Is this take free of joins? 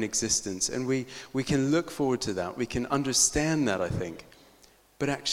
yes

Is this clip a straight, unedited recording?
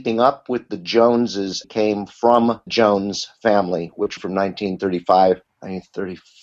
no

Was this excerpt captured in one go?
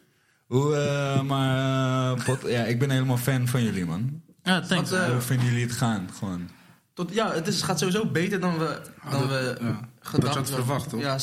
no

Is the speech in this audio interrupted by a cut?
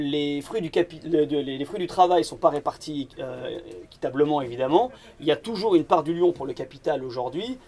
no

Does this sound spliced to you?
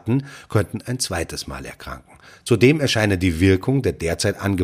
no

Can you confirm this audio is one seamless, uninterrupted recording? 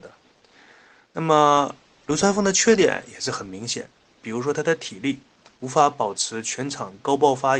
yes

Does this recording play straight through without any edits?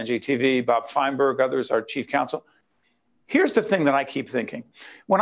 yes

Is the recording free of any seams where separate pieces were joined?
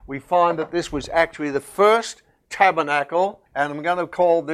no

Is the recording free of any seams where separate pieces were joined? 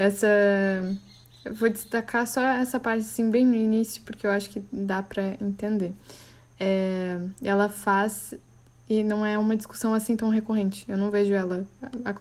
yes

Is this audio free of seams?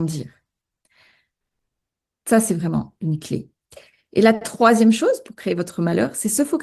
yes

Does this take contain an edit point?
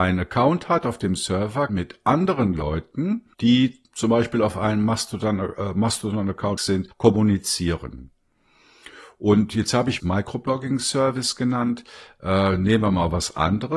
yes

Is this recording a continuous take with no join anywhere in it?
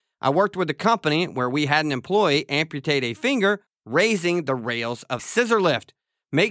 no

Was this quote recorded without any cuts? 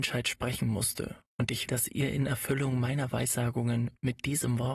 no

